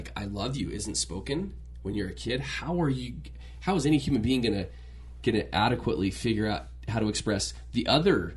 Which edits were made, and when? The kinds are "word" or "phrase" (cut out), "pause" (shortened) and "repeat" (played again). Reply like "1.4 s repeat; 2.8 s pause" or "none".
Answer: none